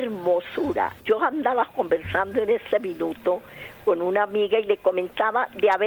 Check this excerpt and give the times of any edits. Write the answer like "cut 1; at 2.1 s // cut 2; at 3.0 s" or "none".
cut 1; at 1.0 s